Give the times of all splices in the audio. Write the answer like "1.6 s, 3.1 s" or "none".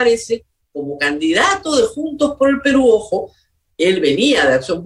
none